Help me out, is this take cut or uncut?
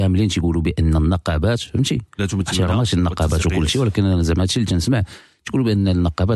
uncut